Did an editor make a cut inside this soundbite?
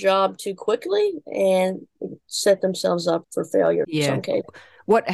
yes; 2 cuts; at 3.2 s, 3.8 s

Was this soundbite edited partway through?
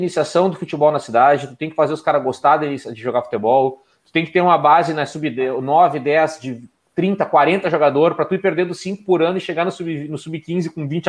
no; 0 cuts

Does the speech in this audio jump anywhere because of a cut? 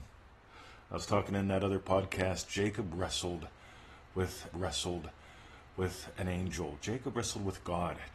yes; 1 cut; at 4.5 s

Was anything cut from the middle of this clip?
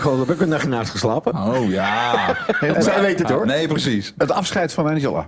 yes; 2 cuts; at 2.7 s, 3.2 s

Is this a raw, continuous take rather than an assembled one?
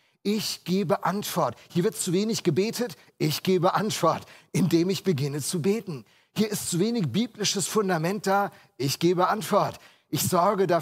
yes; 0 cuts

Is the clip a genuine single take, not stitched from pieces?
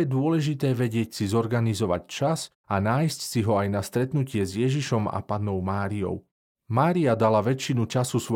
yes; 0 cuts

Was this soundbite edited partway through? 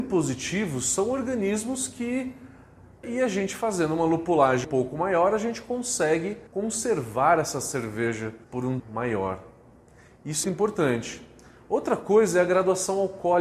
yes; 6 cuts; at 3.0 s, 4.6 s, 6.5 s, 8.4 s, 8.8 s, 10.4 s

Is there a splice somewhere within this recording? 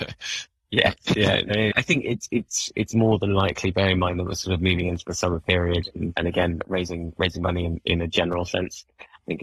no; 0 cuts

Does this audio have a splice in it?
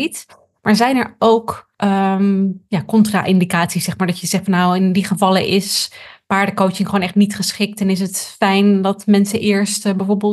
yes; 1 cut; at 1.7 s

